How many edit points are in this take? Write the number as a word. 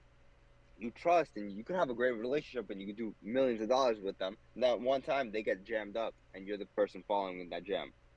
three